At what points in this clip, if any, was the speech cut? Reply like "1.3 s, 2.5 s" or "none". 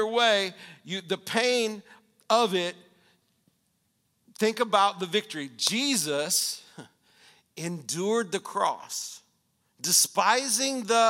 none

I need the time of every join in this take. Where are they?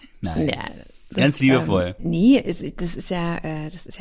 2.0 s

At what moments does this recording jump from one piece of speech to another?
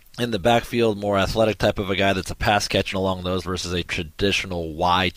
2.9 s, 3.4 s, 3.8 s

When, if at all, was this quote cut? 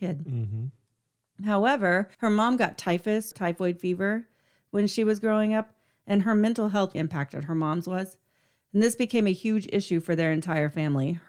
2.1 s, 3.3 s, 6.9 s

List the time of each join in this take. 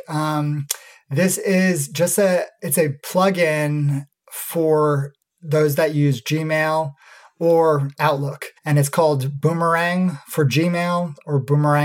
8.6 s

